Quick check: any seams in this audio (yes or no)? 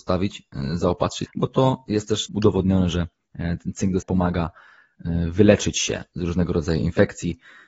yes